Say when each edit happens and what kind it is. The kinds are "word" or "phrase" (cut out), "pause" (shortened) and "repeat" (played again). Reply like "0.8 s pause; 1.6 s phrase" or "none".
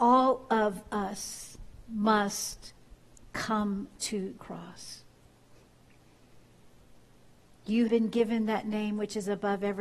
4.4 s word; 7.9 s word